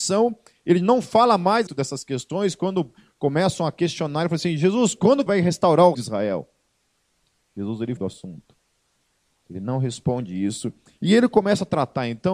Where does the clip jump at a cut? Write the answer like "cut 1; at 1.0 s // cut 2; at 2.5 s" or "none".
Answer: cut 1; at 1.7 s // cut 2; at 5.3 s // cut 3; at 5.9 s // cut 4; at 8.0 s